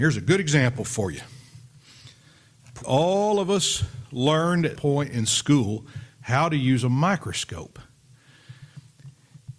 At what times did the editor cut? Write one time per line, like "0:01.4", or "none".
0:02.8
0:04.8